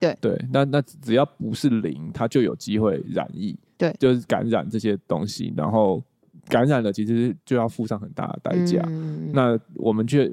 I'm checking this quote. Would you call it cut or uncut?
uncut